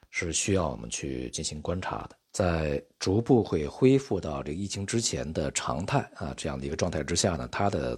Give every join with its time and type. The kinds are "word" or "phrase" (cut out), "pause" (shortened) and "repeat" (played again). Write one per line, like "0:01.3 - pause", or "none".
0:02.2 - pause

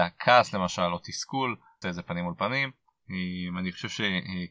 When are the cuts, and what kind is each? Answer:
0:01.8 - phrase

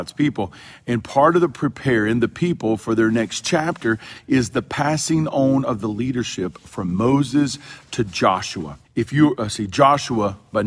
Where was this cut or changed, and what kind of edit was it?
0:08.8 - pause

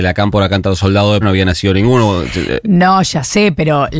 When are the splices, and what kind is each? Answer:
0:01.2 - word

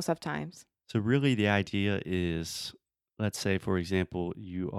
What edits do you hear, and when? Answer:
none

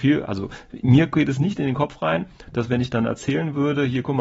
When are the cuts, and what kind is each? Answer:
none

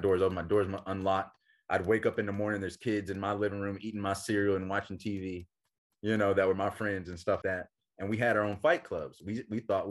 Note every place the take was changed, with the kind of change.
0:07.4 - word

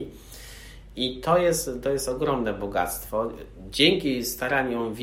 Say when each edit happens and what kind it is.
none

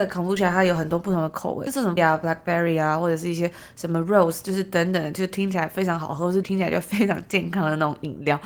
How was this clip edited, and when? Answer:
0:02.0 - word
0:06.4 - word

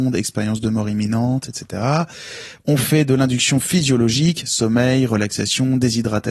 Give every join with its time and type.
none

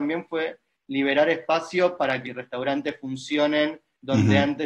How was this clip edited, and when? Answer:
0:02.3 - phrase

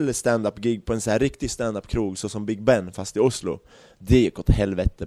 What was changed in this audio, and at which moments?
none

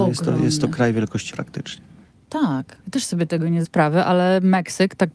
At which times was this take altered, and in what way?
0:01.3 - word
0:02.8 - pause
0:03.6 - word

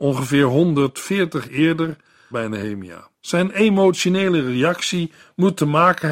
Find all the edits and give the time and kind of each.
0:01.4 - word
0:02.3 - phrase
0:03.1 - pause

